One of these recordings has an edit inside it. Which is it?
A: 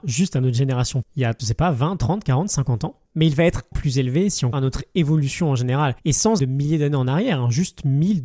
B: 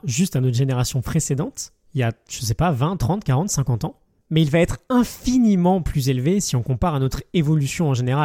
A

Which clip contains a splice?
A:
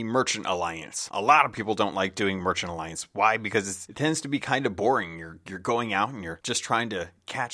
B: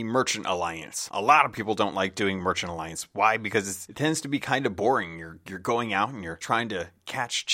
B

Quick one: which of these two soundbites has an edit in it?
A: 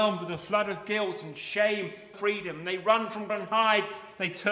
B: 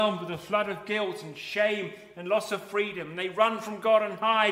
A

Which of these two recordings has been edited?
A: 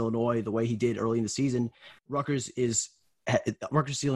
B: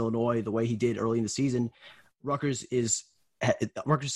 A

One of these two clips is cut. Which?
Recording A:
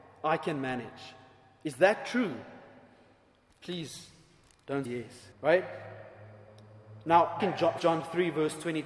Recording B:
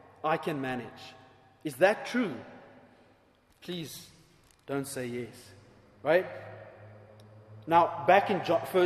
A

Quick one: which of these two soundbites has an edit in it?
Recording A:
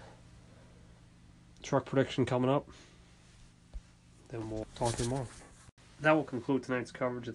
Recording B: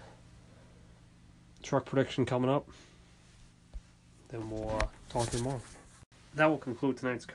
A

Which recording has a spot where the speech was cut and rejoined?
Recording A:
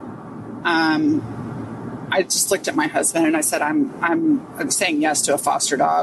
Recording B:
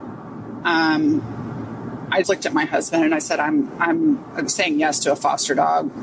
B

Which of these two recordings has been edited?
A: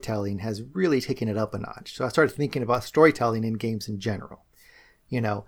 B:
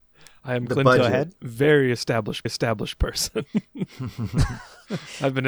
B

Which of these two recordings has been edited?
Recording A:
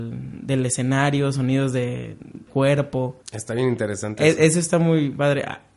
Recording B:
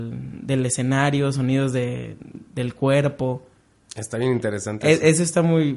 A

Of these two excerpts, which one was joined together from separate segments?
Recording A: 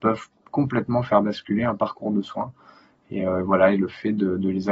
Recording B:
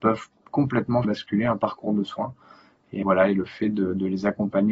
B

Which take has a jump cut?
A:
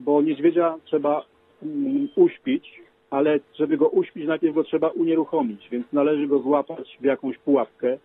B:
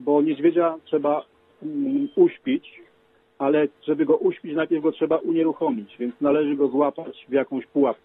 A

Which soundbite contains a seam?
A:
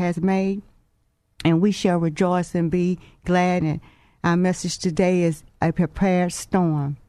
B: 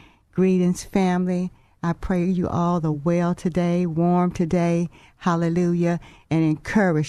A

